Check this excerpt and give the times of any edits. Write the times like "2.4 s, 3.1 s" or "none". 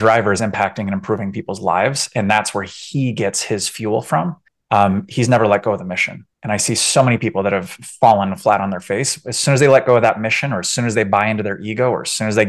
4.5 s, 6.3 s